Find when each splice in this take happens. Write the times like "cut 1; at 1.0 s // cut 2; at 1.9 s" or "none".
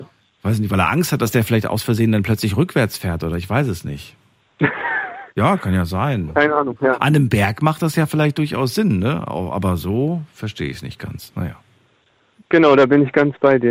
cut 1; at 5.3 s